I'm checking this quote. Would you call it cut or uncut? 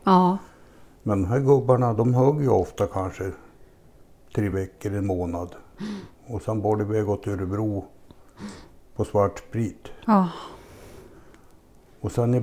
uncut